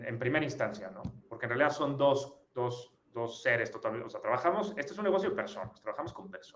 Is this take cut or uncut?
uncut